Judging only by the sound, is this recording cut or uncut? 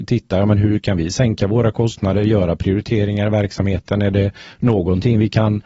uncut